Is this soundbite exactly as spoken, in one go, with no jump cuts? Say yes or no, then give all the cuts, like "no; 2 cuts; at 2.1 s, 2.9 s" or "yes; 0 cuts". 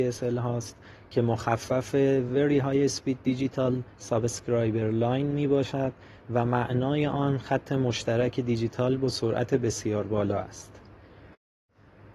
yes; 0 cuts